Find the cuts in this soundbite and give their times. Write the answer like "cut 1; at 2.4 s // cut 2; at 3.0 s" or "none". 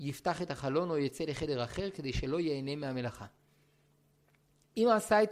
none